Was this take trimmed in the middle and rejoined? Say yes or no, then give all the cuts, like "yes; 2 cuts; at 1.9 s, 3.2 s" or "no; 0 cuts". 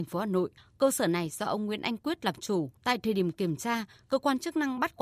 yes; 1 cut; at 2.8 s